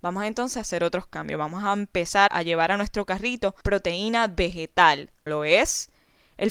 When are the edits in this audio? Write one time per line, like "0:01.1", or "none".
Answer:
0:02.3
0:03.6
0:05.3